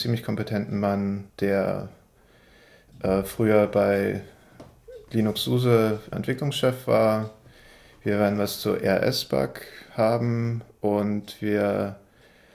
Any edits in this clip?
yes; 2 cuts; at 1.3 s, 6.1 s

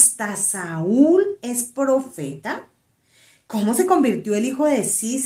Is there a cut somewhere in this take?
no; 0 cuts

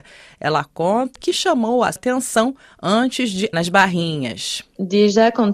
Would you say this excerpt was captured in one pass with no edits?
no; 3 cuts; at 1.2 s, 2.0 s, 3.5 s

